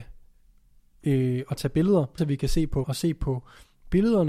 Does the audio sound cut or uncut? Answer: cut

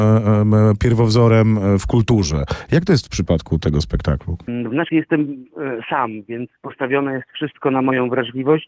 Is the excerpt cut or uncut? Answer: cut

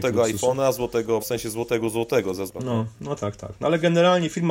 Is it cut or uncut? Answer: cut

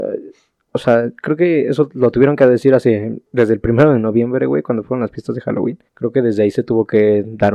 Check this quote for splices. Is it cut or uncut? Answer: cut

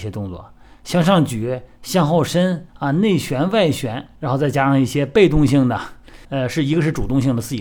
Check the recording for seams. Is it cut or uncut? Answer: cut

